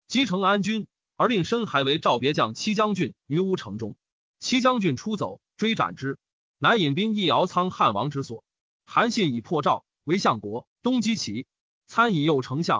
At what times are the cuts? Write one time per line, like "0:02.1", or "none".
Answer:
none